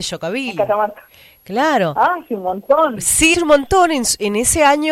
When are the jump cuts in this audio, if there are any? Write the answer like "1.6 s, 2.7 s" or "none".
3.3 s

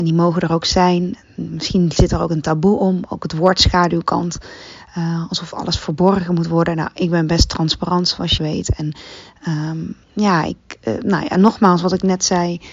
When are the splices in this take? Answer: 8.4 s, 10.0 s

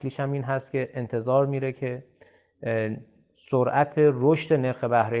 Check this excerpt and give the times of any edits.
none

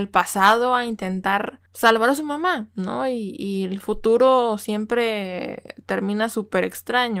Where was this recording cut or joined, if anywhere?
1.7 s

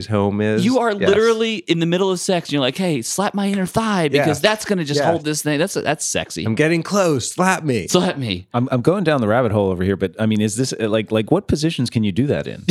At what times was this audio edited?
none

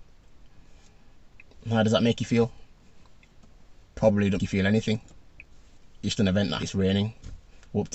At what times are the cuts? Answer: 4.4 s, 6.2 s, 6.6 s

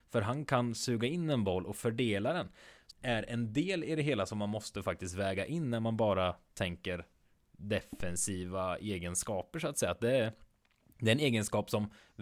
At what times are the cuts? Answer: 2.9 s

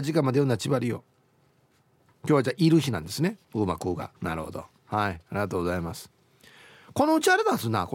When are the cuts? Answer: 4.2 s

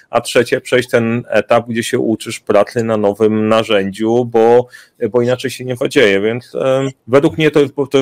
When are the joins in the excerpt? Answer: 7.0 s

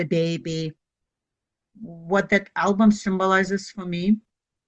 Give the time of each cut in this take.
none

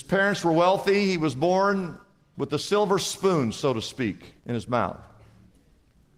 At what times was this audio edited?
4.4 s

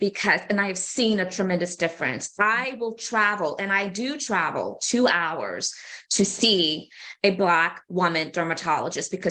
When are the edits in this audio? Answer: none

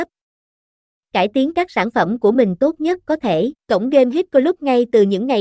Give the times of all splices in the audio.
3.6 s

